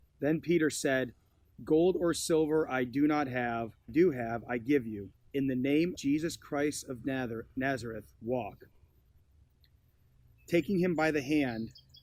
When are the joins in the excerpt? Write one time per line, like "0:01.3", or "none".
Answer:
0:03.9
0:05.1
0:06.0
0:08.1

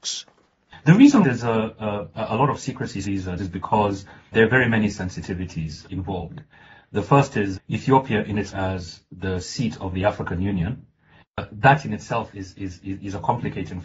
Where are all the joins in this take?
0:01.2
0:03.0
0:03.4
0:04.3
0:05.9
0:07.5
0:08.5
0:12.3

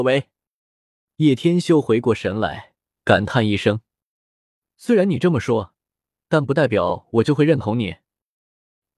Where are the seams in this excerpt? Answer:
none

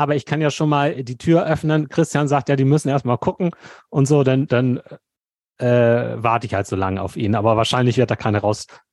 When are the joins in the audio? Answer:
none

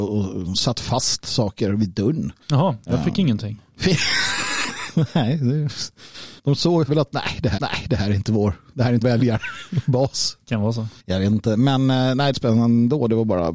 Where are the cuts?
0:02.4
0:06.4
0:06.9
0:07.6
0:09.0
0:11.0
0:12.3

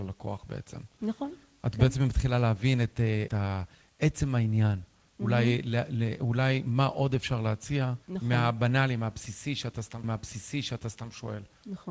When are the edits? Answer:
0:03.3
0:08.0
0:10.0

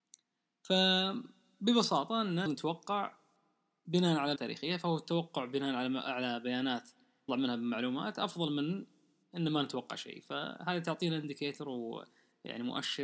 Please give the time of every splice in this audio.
0:02.5
0:04.4
0:07.3

